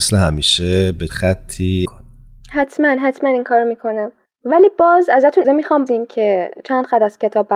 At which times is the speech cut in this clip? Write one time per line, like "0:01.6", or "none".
0:01.1
0:01.9
0:04.3
0:05.4
0:05.9